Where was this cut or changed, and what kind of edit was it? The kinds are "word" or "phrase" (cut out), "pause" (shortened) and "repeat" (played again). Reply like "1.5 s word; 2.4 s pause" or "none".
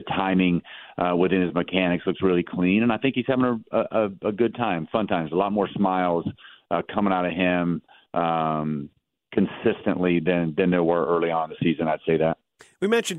none